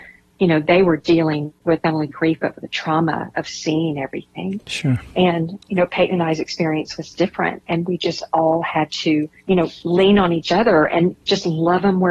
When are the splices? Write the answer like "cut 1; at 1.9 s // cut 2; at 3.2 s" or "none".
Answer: cut 1; at 1.6 s // cut 2; at 9.4 s

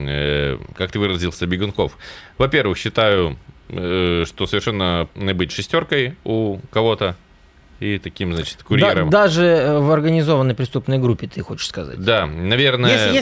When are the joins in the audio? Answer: cut 1; at 5.1 s

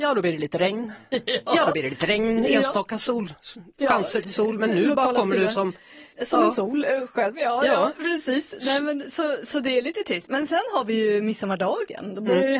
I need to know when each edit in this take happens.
cut 1; at 6.1 s

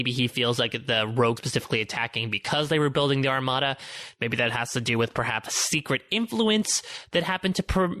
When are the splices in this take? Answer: cut 1; at 1.4 s // cut 2; at 5.5 s

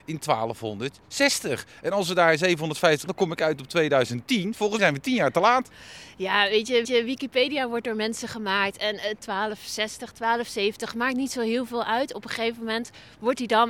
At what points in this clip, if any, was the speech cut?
cut 1; at 3.1 s // cut 2; at 4.8 s // cut 3; at 6.8 s

